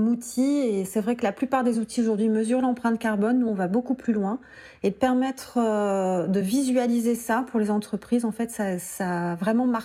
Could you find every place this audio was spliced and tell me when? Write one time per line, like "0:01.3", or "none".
none